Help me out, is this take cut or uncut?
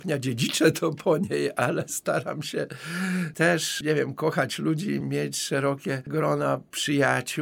uncut